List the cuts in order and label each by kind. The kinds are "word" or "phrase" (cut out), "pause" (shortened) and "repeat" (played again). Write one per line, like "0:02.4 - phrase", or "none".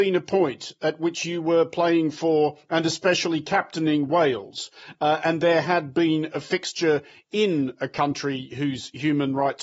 none